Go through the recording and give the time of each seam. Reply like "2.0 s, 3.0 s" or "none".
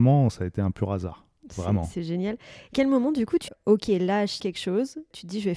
2.7 s, 3.5 s, 4.4 s